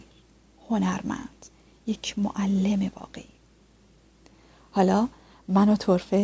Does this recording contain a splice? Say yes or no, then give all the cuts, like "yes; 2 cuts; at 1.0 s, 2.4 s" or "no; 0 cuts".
no; 0 cuts